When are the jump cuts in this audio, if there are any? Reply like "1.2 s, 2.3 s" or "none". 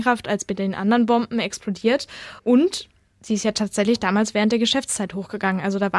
2.4 s